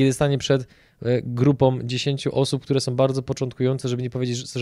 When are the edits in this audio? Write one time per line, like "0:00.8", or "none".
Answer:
none